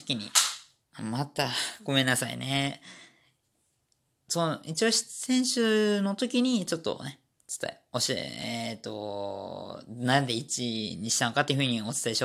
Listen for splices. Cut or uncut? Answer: uncut